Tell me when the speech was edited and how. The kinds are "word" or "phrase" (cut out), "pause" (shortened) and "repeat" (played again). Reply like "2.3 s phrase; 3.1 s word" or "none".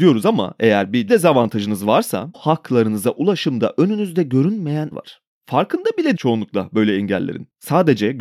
1.1 s word; 2.3 s word; 4.9 s word; 6.2 s word